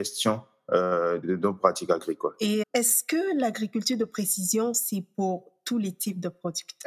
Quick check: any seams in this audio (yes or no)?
yes